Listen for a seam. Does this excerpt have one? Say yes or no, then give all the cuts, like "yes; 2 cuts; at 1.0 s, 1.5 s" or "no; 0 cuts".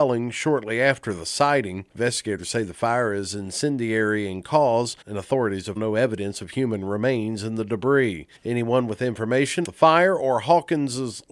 yes; 4 cuts; at 5.0 s, 5.8 s, 8.4 s, 9.6 s